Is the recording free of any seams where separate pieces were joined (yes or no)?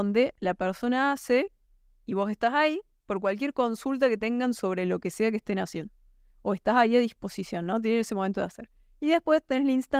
yes